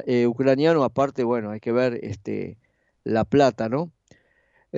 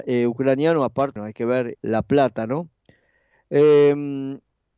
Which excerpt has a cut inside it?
second; 2 cuts; at 1.2 s, 1.7 s

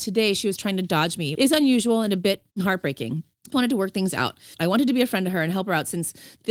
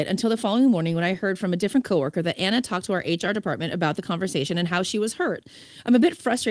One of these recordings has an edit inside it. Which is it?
first; 3 cuts; at 1.3 s, 2.5 s, 3.5 s

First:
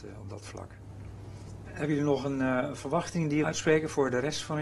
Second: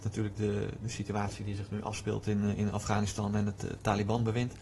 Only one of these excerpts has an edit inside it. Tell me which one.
first; 1 cut; at 3.4 s

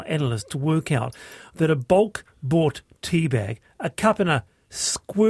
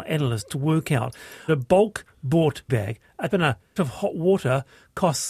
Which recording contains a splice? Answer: second; 4 cuts; at 1.5 s, 2.7 s, 3.3 s, 3.8 s

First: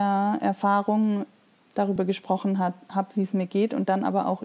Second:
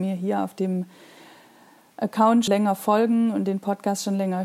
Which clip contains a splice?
second; 1 cut; at 2.5 s

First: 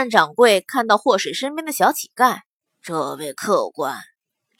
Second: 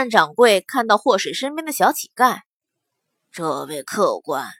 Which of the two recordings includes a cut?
first; 1 cut; at 2.7 s

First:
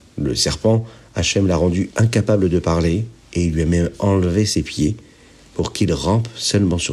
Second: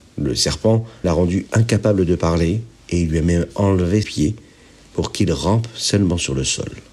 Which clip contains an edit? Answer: second; 2 cuts; at 1.0 s, 4.0 s

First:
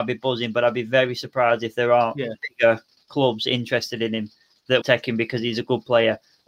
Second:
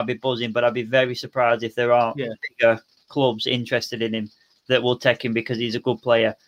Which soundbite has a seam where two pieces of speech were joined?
first; 1 cut; at 4.8 s

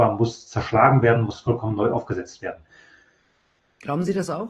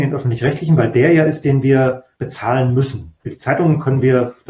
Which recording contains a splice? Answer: second; 2 cuts; at 2.1 s, 3.2 s

